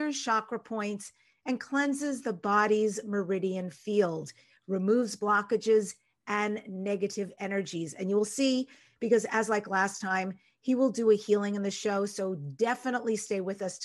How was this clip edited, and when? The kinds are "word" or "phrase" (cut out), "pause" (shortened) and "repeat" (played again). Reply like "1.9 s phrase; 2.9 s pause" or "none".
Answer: none